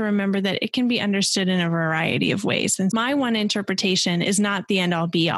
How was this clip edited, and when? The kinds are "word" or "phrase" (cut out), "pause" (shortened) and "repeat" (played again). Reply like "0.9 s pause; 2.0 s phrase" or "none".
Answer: 2.9 s word